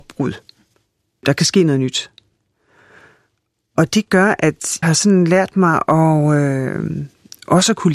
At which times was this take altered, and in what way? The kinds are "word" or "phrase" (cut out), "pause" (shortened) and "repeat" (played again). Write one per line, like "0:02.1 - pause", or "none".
0:04.8 - word